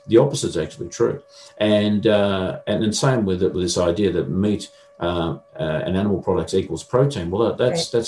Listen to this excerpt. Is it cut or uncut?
uncut